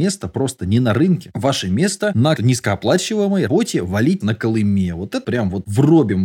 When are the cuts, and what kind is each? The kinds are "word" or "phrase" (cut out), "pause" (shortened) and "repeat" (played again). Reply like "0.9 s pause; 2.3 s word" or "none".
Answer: 2.4 s word; 3.5 s word; 4.2 s word; 5.2 s word